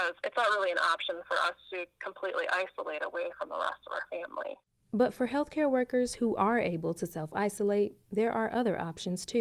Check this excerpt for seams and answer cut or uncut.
uncut